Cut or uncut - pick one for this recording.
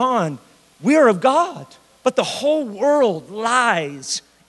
uncut